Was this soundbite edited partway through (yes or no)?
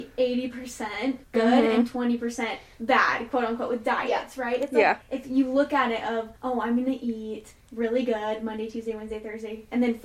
yes